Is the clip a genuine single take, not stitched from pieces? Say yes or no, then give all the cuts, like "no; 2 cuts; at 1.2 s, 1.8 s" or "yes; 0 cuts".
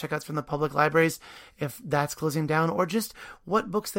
yes; 0 cuts